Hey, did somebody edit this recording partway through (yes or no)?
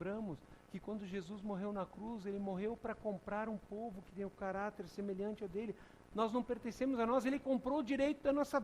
no